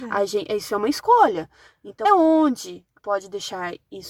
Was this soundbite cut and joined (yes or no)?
yes